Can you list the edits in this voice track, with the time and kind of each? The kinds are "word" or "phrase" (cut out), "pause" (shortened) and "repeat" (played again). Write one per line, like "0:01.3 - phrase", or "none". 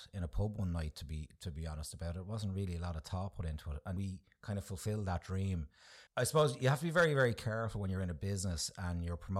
0:04.0 - word
0:06.1 - pause